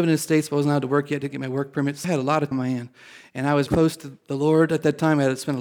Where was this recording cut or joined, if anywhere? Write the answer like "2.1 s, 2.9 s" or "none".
2.0 s, 2.5 s, 3.7 s